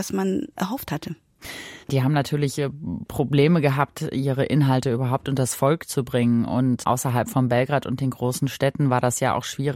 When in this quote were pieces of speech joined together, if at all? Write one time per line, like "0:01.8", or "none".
0:01.8